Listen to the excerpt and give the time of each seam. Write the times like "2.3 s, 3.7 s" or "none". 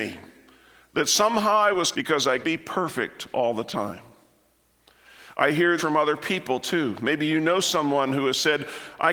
1.9 s, 2.4 s, 5.8 s